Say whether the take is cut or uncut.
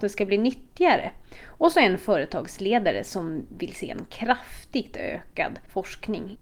uncut